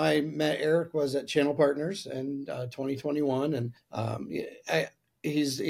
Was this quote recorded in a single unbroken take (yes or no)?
no